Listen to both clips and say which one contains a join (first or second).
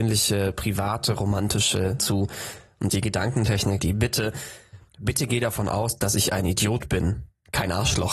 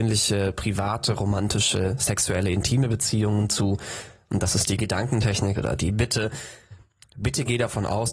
first